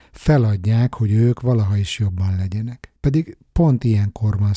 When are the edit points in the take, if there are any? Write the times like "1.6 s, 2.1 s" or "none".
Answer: 3.0 s